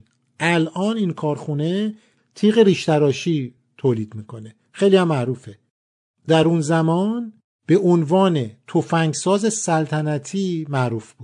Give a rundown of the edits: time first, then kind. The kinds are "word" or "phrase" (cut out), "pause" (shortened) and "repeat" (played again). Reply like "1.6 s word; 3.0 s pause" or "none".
none